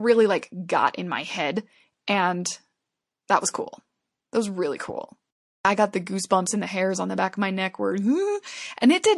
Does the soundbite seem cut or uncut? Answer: uncut